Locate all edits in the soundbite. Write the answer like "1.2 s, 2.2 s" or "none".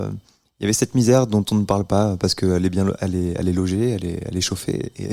none